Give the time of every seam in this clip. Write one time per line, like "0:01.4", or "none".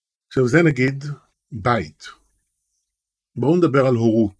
0:01.3